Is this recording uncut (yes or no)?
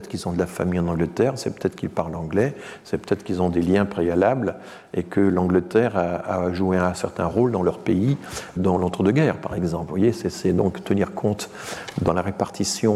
no